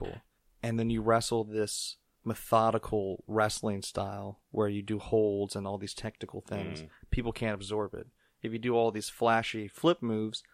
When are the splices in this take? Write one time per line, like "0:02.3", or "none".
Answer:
0:02.2